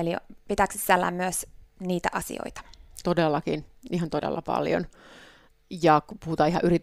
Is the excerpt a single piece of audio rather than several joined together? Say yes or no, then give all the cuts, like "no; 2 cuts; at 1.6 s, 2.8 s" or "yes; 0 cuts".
yes; 0 cuts